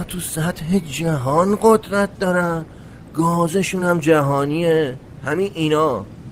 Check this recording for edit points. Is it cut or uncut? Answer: uncut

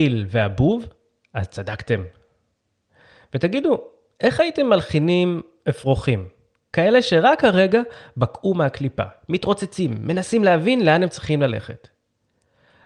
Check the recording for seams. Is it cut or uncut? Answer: uncut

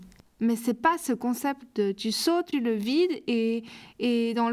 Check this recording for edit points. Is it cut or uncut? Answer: cut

